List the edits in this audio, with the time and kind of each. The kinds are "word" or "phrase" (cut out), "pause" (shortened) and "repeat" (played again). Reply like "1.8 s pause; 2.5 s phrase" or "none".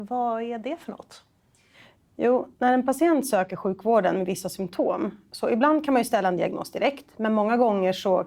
none